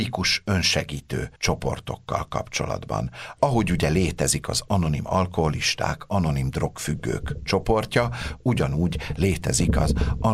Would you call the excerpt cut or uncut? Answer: cut